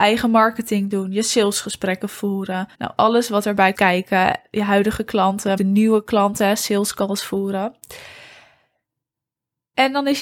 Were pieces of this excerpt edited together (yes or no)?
yes